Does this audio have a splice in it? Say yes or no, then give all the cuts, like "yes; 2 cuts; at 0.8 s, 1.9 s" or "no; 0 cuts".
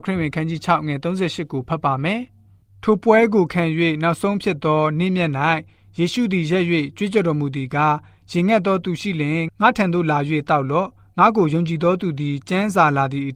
no; 0 cuts